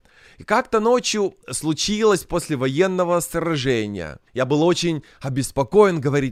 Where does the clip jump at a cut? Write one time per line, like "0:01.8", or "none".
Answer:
0:04.3